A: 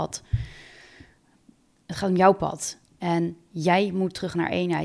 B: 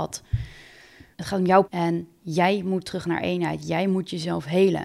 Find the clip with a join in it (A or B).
B